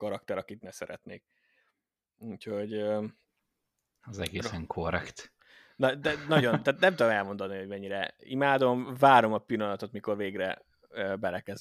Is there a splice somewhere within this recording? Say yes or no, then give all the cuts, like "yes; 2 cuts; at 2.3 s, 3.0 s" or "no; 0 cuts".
no; 0 cuts